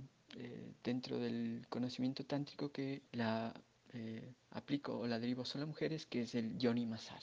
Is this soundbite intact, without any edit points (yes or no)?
no